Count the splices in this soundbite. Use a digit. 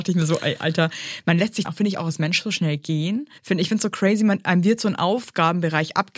2